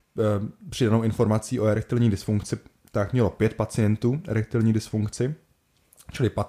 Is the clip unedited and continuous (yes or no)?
yes